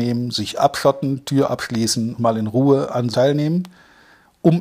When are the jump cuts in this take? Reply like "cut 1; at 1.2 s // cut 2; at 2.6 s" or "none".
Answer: cut 1; at 2.2 s // cut 2; at 3.1 s